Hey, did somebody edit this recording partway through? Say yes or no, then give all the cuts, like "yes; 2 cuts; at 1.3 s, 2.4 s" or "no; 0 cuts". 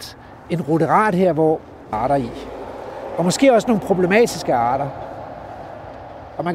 yes; 1 cut; at 1.9 s